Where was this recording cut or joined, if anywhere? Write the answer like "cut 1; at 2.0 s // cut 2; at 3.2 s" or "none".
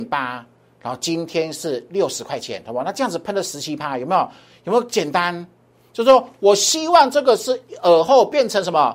none